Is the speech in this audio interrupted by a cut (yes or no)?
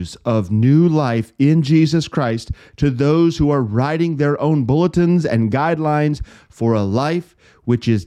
no